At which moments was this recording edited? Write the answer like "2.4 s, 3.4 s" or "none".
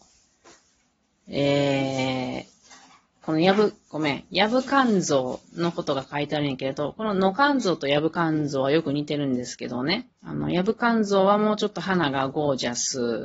3.9 s, 10.1 s